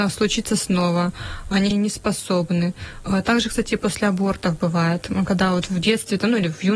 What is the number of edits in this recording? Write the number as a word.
one